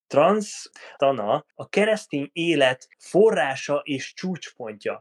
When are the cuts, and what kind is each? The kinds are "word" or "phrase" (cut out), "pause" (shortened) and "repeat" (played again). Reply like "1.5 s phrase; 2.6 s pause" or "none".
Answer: 1.0 s phrase; 1.5 s pause; 2.9 s pause